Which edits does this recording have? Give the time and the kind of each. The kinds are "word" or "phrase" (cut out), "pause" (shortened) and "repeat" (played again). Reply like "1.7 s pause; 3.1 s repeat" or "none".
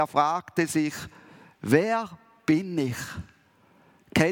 none